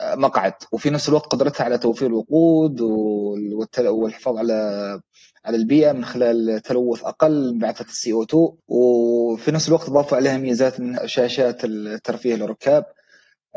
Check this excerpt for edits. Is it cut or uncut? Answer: cut